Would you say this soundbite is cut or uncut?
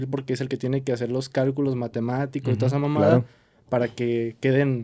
uncut